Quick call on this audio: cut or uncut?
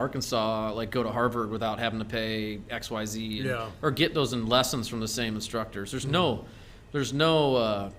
uncut